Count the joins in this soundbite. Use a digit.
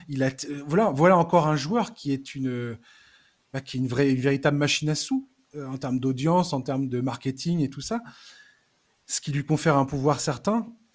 1